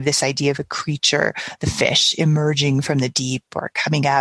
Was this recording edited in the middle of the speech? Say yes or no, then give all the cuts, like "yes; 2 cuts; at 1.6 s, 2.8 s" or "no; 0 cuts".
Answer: no; 0 cuts